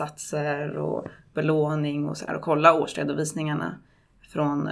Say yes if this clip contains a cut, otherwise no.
yes